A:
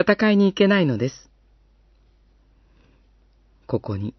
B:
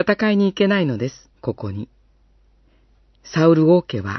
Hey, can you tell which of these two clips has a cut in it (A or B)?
B